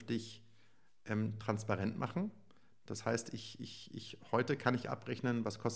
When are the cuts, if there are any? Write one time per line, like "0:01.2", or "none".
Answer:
none